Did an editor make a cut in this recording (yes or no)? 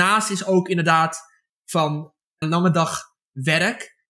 yes